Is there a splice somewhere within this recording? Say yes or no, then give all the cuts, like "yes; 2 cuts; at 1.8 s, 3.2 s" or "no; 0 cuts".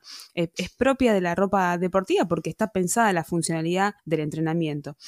yes; 1 cut; at 4.0 s